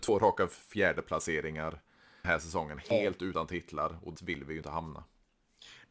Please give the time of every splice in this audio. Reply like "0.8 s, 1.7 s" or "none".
2.2 s, 4.2 s